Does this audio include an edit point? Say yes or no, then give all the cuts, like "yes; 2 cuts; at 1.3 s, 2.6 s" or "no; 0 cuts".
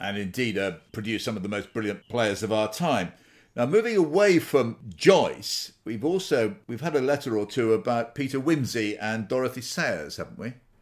no; 0 cuts